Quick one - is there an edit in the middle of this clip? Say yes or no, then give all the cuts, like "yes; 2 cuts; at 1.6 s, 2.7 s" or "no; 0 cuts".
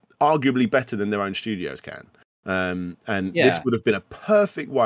no; 0 cuts